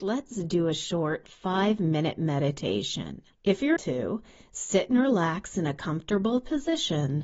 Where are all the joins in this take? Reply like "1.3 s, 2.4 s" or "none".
3.3 s, 3.8 s